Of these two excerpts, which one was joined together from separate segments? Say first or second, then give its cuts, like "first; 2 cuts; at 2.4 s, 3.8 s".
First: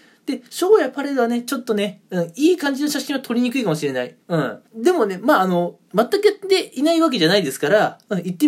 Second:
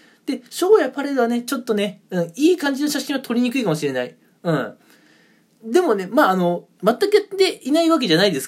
first; 2 cuts; at 4.2 s, 4.7 s